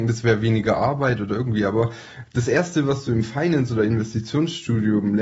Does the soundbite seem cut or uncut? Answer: uncut